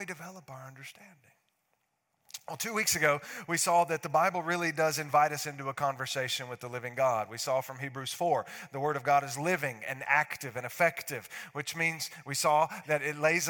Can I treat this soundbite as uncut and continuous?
yes; 0 cuts

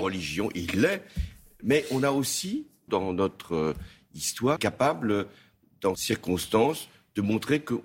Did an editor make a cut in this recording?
yes; 3 cuts; at 2.9 s, 4.6 s, 6.0 s

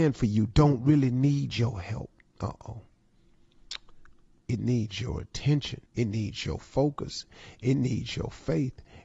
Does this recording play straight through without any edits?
no; 1 cut; at 5.9 s

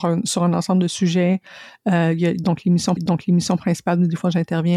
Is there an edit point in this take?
yes; 1 cut; at 3.0 s

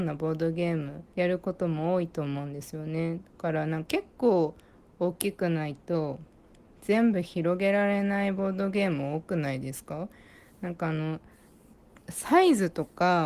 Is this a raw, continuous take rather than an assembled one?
no; 1 cut; at 1.1 s

